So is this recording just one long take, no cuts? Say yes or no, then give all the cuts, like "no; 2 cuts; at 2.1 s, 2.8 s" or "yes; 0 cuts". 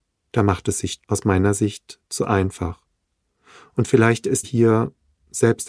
no; 2 cuts; at 1.0 s, 4.4 s